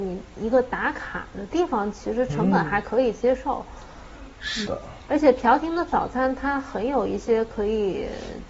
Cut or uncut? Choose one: cut